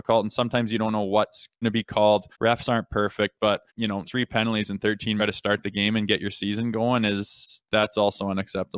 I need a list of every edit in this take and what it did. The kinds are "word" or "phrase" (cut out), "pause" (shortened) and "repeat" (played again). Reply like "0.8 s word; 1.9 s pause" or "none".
1.6 s word; 2.3 s pause; 3.7 s pause; 4.0 s word; 5.2 s phrase